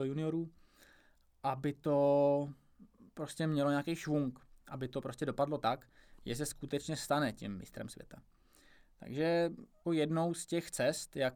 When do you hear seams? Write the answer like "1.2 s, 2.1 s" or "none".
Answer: 9.8 s